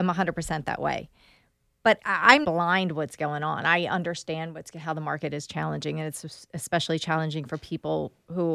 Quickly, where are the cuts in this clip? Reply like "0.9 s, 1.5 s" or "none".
2.4 s